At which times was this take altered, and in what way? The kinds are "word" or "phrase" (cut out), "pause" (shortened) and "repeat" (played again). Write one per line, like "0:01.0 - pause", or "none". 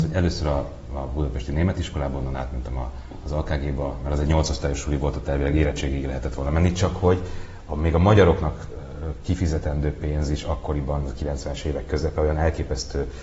none